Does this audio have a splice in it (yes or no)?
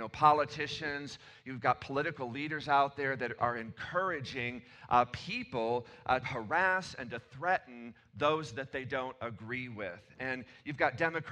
yes